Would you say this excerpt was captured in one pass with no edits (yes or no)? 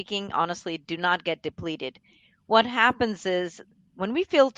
yes